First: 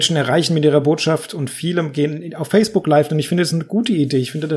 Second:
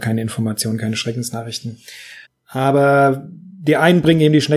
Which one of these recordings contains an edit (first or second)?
second